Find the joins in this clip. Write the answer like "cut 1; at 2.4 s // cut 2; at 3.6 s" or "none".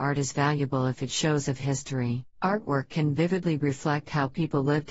cut 1; at 1.5 s // cut 2; at 2.3 s